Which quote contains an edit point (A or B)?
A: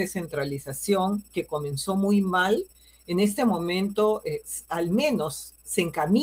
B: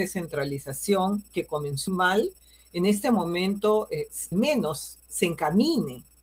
B